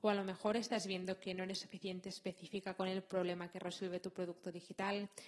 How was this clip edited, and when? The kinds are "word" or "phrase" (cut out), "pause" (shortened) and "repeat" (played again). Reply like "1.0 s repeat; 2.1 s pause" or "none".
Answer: none